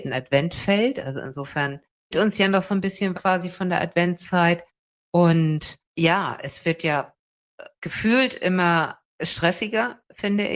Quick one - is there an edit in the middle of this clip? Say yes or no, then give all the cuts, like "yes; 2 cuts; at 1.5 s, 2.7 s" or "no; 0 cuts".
yes; 5 cuts; at 2.1 s, 3.1 s, 5.9 s, 7.7 s, 9.1 s